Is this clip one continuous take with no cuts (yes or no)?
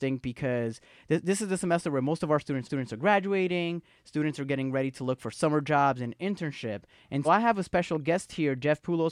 no